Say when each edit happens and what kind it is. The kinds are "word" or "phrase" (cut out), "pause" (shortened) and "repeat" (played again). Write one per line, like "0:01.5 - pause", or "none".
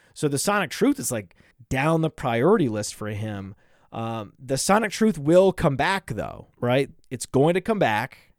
0:06.5 - pause